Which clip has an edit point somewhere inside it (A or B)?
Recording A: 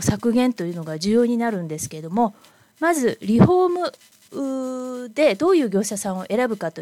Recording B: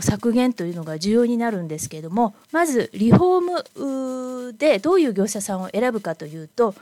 B